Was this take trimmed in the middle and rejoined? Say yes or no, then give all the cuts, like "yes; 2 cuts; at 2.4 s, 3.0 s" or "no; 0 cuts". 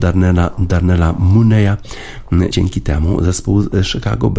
yes; 1 cut; at 2.5 s